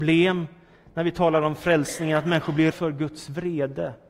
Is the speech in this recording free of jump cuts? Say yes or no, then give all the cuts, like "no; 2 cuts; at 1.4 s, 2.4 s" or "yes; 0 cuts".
no; 1 cut; at 2.7 s